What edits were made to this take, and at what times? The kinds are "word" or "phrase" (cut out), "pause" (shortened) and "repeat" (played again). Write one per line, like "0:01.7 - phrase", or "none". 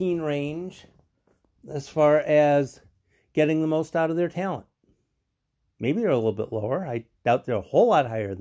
none